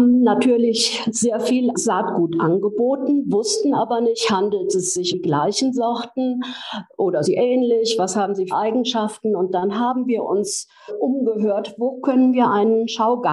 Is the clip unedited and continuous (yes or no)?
no